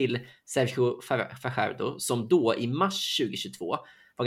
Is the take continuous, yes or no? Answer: yes